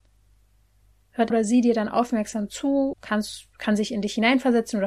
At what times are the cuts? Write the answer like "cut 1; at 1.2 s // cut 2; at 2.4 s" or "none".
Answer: cut 1; at 1.3 s // cut 2; at 2.9 s